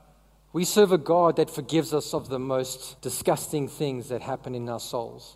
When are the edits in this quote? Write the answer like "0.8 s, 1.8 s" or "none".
3.0 s